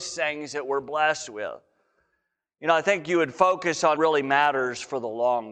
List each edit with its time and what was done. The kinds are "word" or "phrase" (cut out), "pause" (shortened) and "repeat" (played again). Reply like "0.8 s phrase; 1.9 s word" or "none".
4.0 s word